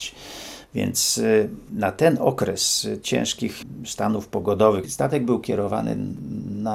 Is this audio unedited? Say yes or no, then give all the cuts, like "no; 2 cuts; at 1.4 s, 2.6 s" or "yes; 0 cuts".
no; 1 cut; at 3.0 s